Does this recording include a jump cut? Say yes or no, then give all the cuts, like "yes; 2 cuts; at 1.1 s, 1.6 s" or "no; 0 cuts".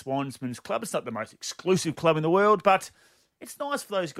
no; 0 cuts